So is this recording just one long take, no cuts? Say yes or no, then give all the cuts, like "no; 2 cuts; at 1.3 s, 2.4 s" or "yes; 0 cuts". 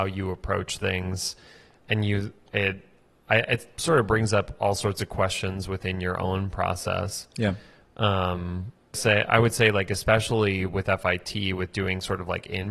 no; 1 cut; at 8.9 s